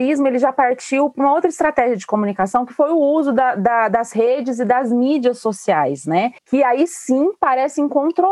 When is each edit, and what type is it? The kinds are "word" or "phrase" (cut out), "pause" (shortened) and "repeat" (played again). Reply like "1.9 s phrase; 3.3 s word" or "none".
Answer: 6.4 s pause